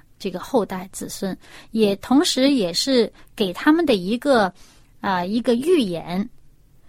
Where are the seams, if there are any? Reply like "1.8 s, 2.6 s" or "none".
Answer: none

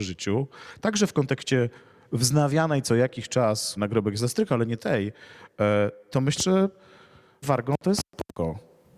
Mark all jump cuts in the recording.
3.8 s, 4.8 s, 6.4 s, 7.4 s

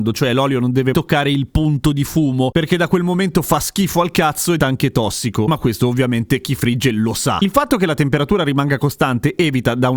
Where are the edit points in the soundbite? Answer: 0.9 s, 4.6 s

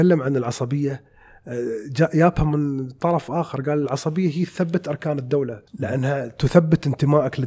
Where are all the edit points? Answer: 5.7 s

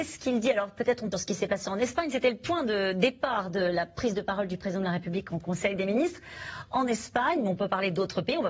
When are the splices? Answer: 1.1 s

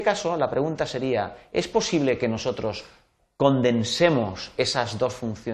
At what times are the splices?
none

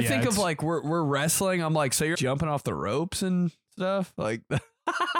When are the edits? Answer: 2.1 s

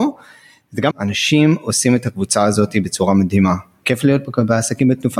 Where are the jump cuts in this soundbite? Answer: 0.9 s

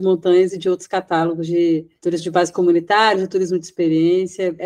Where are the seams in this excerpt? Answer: 2.0 s

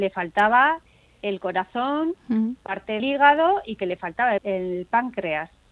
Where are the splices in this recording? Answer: 3.0 s, 4.4 s

